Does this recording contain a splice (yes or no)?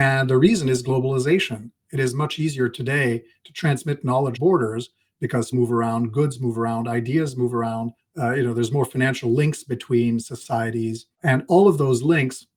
yes